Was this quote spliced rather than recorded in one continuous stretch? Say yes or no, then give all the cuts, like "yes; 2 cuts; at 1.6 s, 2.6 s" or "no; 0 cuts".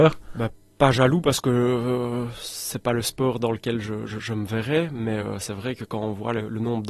no; 0 cuts